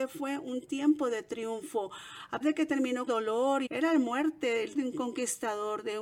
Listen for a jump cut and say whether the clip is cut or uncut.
cut